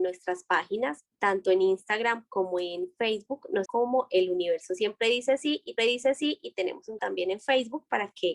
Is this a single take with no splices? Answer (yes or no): no